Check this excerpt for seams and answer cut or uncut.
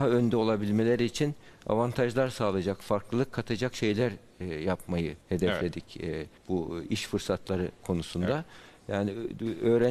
cut